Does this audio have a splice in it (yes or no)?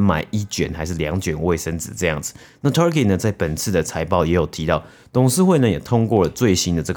no